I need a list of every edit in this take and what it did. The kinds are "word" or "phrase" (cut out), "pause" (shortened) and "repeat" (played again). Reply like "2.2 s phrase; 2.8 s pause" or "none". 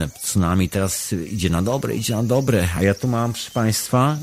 none

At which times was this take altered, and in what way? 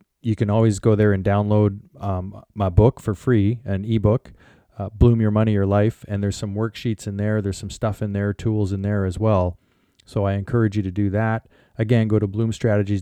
none

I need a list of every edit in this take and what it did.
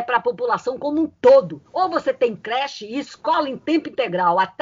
none

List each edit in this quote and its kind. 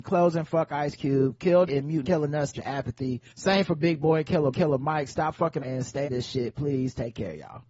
1.7 s word; 2.0 s phrase; 2.5 s phrase; 3.3 s pause; 4.5 s repeat; 5.6 s word; 6.0 s word

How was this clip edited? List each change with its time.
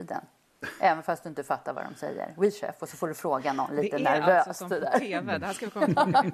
none

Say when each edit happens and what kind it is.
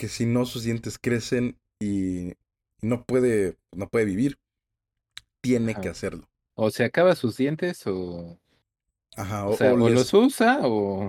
none

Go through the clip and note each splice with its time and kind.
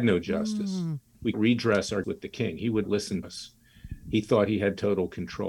1.3 s phrase; 2.0 s word; 2.8 s word; 3.2 s word

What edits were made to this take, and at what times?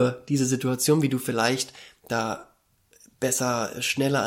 none

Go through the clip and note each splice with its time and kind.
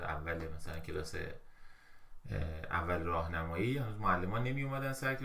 none

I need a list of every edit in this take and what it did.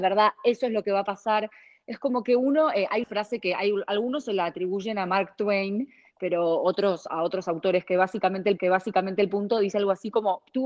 3.0 s word; 8.6 s repeat

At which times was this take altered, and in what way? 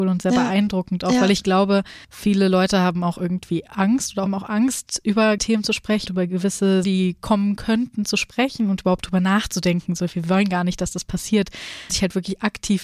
2.0 s pause; 4.3 s phrase; 5.4 s word; 6.1 s word; 6.8 s word; 11.9 s word

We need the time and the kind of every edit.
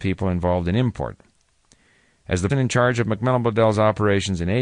2.5 s word

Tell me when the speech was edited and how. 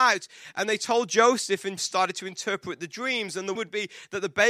1.8 s word; 3.6 s word

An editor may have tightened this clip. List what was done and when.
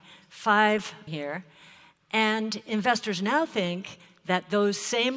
1.1 s phrase

